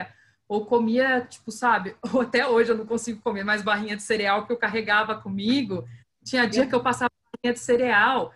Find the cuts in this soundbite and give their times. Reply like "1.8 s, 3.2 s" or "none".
none